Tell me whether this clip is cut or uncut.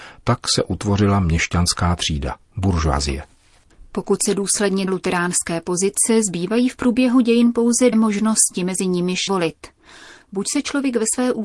cut